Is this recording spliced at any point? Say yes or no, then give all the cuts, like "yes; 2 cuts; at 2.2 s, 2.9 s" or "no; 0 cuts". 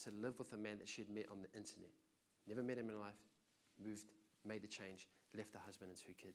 no; 0 cuts